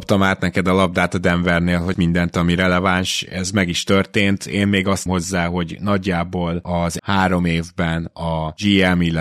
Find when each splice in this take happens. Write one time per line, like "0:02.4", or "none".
0:01.9
0:05.1
0:07.0